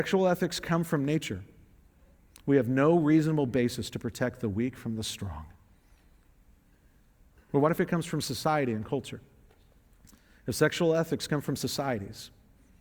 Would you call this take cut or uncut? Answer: uncut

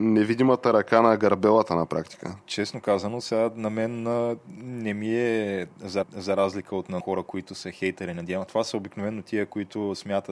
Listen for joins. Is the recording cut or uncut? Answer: cut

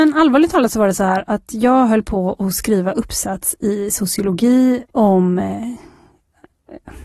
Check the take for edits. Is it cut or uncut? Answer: cut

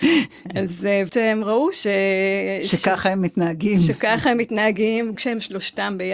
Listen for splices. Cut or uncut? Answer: cut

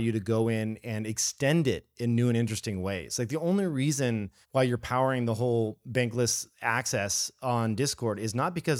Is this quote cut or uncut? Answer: cut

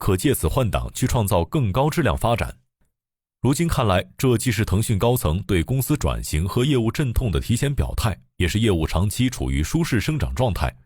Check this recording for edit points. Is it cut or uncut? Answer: uncut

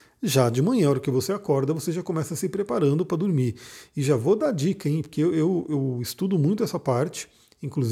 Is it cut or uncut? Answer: uncut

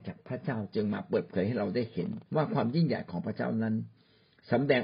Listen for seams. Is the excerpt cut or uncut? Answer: cut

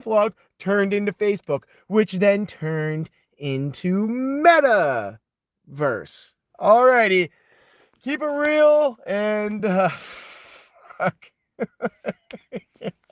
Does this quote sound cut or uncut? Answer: uncut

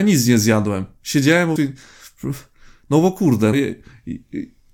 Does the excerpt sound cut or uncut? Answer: cut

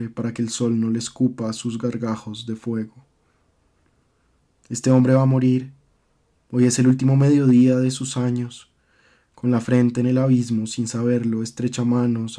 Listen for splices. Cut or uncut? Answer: uncut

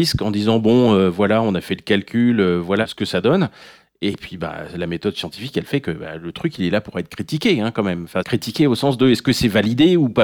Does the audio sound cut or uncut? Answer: uncut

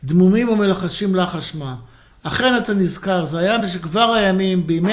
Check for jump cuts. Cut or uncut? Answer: uncut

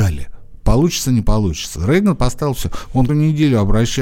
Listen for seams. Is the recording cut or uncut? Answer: cut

